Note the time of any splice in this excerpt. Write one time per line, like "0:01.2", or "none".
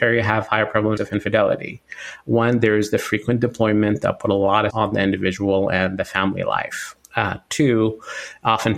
0:01.0
0:04.7
0:07.0